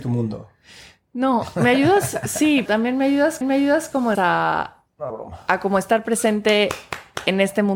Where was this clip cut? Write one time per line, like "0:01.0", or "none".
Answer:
0:02.7
0:03.4
0:04.1
0:05.1